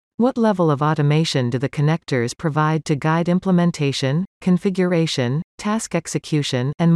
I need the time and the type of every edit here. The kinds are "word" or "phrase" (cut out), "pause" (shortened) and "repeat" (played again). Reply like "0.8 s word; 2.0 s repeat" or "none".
none